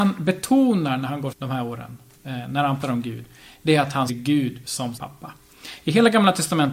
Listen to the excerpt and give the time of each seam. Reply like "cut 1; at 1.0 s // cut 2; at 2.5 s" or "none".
cut 1; at 1.3 s // cut 2; at 2.8 s // cut 3; at 4.1 s // cut 4; at 5.0 s